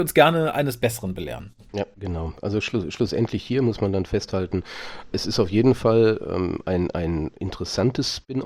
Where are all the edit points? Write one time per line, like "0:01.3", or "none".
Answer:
0:05.1

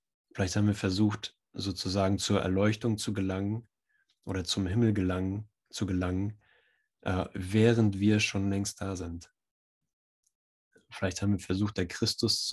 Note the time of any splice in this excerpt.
none

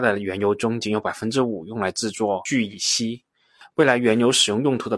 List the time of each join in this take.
none

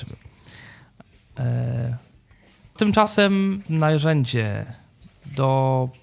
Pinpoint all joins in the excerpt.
0:02.8
0:03.7

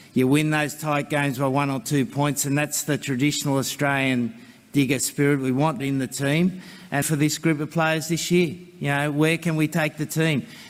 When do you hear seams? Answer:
0:05.8
0:07.0

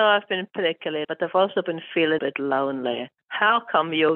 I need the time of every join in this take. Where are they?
0:01.0
0:02.2

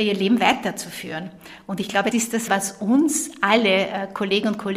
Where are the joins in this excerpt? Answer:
0:02.1
0:02.5

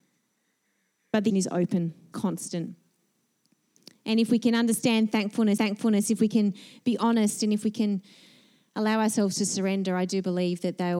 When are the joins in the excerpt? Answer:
0:01.3
0:02.1
0:05.6

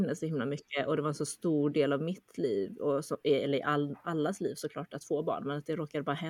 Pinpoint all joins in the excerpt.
none

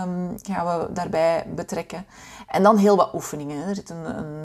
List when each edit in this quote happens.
none

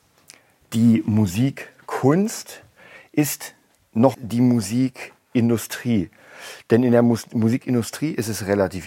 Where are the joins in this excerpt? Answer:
0:04.1

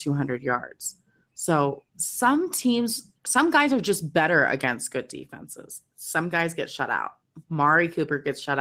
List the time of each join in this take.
0:01.9
0:03.2

